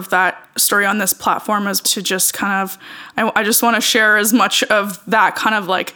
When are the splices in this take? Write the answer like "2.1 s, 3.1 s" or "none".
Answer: 1.8 s

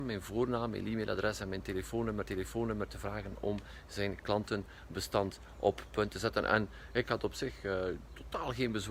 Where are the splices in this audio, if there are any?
2.2 s

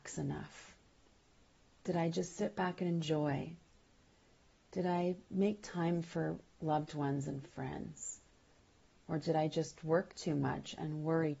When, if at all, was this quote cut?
none

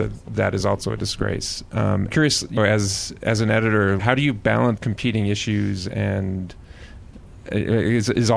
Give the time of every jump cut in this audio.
2.1 s, 2.6 s, 4.0 s, 4.8 s

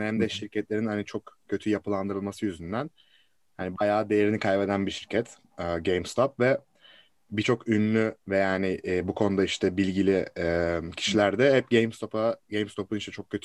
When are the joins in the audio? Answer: none

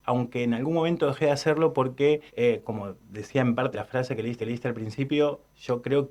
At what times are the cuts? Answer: 2.3 s, 3.7 s, 4.4 s

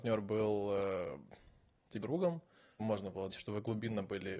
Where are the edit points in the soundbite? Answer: 2.0 s, 2.8 s, 3.3 s

